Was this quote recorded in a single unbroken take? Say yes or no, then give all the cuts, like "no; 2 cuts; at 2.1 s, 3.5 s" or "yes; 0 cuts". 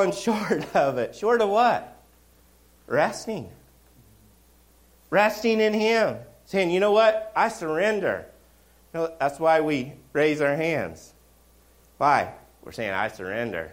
yes; 0 cuts